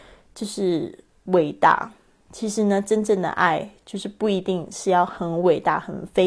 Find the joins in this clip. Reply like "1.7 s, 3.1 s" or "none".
none